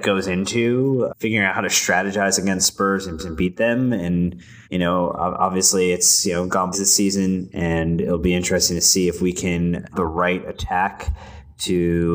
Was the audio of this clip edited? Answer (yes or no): yes